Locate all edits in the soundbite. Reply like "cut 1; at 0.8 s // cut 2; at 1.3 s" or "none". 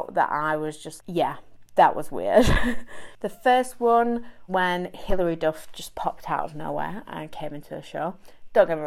cut 1; at 1.0 s // cut 2; at 4.5 s